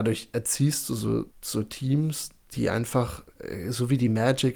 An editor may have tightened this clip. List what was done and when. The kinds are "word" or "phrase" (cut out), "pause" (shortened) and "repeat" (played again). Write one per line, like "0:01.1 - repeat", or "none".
0:01.3 - pause